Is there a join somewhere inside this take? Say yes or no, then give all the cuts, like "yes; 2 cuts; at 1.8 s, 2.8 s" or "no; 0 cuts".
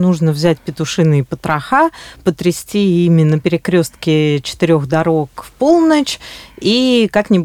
no; 0 cuts